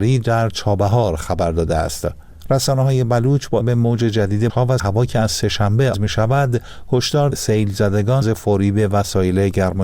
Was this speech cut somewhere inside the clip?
yes; 6 cuts; at 3.6 s, 4.5 s, 4.8 s, 5.9 s, 7.3 s, 8.2 s

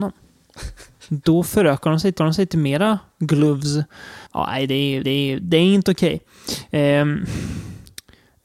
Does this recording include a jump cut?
yes; 2 cuts; at 2.2 s, 5.0 s

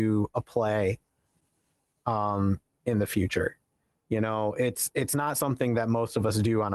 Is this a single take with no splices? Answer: yes; 0 cuts

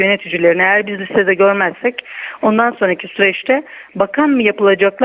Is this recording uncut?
yes; 0 cuts

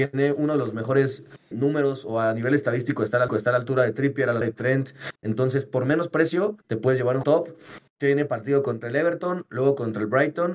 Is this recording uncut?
no; 7 cuts; at 1.5 s, 3.3 s, 4.4 s, 5.2 s, 6.6 s, 7.2 s, 7.9 s

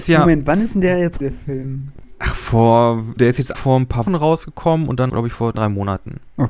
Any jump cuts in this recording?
yes; 6 cuts; at 1.2 s, 3.2 s, 3.5 s, 4.1 s, 5.1 s, 5.5 s

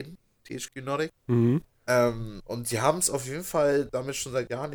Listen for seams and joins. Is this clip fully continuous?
no; 1 cut; at 1.2 s

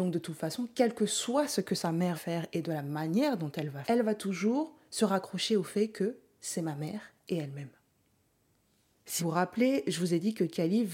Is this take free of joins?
no; 3 cuts; at 2.1 s, 3.8 s, 9.2 s

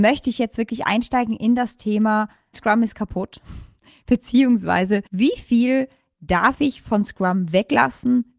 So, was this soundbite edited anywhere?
yes; 2 cuts; at 2.5 s, 5.1 s

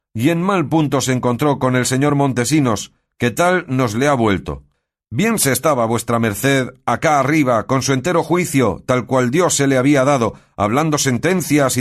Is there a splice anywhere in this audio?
no; 0 cuts

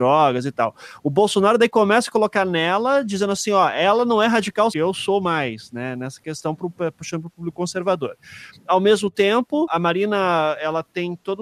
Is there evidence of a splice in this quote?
yes; 2 cuts; at 4.7 s, 9.7 s

